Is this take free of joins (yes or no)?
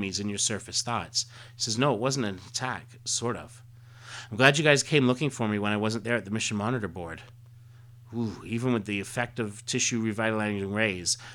yes